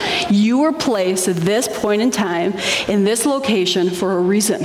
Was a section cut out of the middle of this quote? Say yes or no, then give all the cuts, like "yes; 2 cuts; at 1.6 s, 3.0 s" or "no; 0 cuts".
no; 0 cuts